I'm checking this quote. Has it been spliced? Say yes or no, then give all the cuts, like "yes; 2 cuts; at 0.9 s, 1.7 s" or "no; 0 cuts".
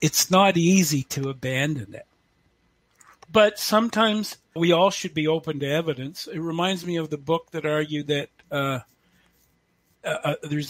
yes; 1 cut; at 4.6 s